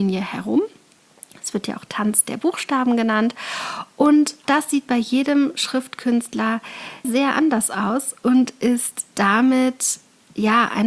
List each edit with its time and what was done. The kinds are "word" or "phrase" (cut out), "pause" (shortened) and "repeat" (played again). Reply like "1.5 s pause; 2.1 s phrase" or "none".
4.4 s word; 7.0 s word